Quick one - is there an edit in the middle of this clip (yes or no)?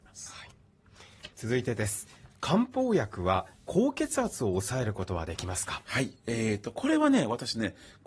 yes